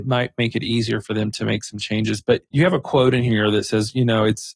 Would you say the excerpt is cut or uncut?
uncut